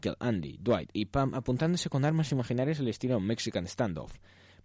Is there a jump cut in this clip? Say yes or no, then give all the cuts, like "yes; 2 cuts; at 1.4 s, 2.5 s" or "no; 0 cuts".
no; 0 cuts